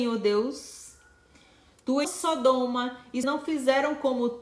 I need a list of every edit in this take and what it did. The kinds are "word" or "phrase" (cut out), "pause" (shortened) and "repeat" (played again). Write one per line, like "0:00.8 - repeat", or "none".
0:02.0 - word
0:03.2 - phrase